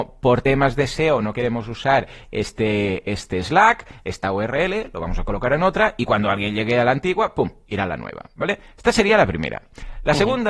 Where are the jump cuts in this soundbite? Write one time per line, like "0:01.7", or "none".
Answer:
none